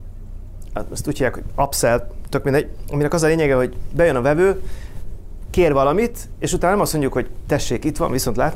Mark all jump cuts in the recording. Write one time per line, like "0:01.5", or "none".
none